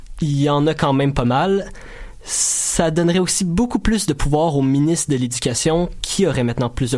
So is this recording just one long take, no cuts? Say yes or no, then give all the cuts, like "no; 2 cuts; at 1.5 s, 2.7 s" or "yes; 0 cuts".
yes; 0 cuts